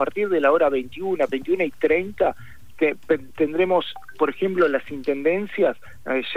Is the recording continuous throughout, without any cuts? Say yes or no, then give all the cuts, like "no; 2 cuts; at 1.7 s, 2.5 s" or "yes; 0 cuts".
yes; 0 cuts